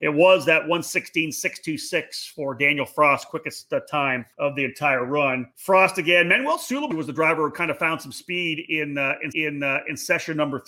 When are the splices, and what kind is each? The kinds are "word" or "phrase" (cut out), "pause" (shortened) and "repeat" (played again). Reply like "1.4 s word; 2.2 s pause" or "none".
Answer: 4.3 s pause; 5.5 s pause; 6.9 s word; 9.3 s repeat